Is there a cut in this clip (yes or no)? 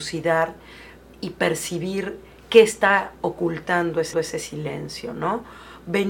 yes